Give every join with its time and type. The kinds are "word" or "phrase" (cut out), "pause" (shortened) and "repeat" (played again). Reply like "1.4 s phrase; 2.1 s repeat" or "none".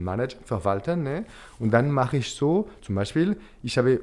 none